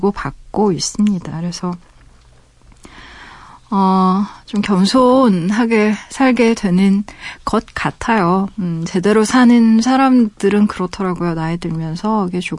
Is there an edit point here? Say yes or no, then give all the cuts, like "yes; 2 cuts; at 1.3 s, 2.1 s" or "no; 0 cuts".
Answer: no; 0 cuts